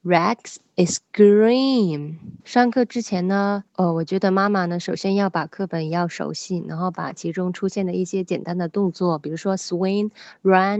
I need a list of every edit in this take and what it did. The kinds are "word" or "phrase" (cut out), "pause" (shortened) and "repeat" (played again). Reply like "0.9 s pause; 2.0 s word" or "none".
2.4 s pause; 3.7 s pause